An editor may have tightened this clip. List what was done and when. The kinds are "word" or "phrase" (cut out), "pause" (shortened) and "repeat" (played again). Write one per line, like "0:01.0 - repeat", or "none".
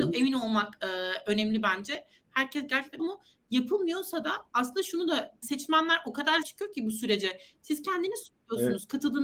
0:03.0 - phrase
0:05.4 - word
0:06.4 - word